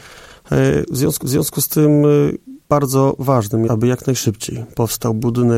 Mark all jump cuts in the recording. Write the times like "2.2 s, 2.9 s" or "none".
1.2 s, 2.6 s, 3.7 s